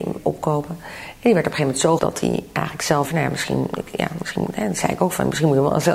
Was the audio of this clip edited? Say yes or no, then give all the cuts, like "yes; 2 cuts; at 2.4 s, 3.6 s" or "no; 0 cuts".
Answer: yes; 2 cuts; at 2.0 s, 3.0 s